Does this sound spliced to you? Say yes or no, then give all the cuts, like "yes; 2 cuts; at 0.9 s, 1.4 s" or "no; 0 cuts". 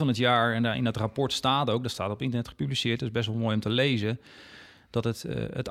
no; 0 cuts